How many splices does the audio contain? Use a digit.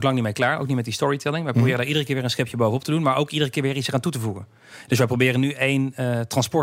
0